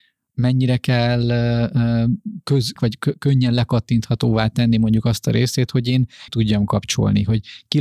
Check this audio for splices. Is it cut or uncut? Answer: cut